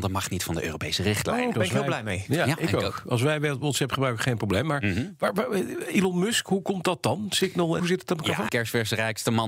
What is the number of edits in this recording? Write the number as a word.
three